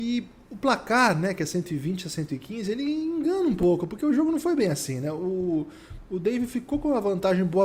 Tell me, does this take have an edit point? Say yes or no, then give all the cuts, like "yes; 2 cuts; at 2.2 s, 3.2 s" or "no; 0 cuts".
no; 0 cuts